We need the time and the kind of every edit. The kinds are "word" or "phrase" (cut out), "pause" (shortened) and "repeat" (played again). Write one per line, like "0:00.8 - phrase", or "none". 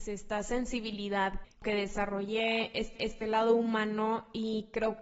0:01.4 - word
0:03.0 - repeat